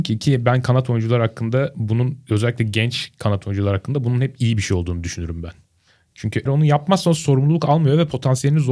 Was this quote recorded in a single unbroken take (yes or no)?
no